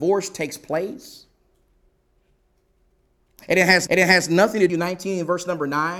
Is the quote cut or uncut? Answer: cut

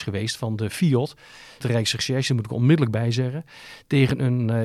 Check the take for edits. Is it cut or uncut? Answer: cut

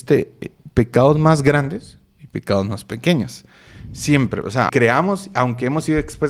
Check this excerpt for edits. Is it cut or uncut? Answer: cut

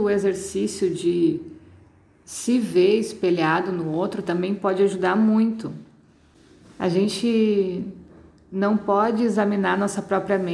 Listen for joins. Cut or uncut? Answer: uncut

